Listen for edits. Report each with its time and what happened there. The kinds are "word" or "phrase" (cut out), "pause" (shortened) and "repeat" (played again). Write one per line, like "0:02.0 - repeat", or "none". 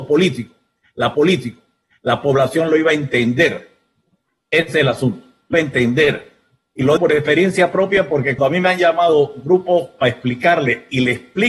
0:01.1 - repeat
0:05.5 - word
0:07.0 - word
0:08.4 - word